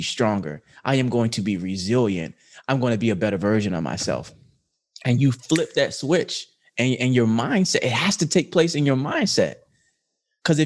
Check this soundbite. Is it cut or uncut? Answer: uncut